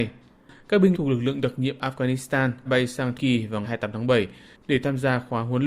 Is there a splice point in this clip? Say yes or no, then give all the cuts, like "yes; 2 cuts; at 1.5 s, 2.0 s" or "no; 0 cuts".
yes; 4 cuts; at 0.9 s, 2.7 s, 3.2 s, 3.6 s